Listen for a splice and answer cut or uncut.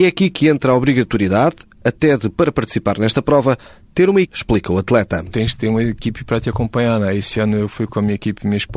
cut